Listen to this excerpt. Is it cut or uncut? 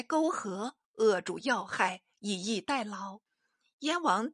cut